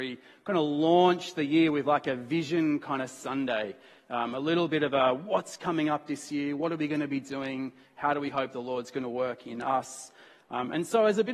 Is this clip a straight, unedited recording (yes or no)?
yes